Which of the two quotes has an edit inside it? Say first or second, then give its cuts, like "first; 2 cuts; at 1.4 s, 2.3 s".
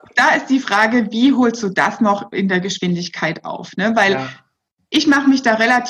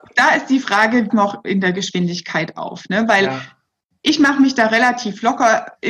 second; 1 cut; at 1.1 s